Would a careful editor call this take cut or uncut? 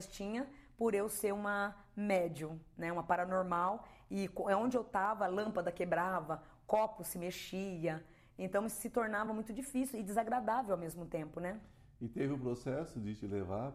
uncut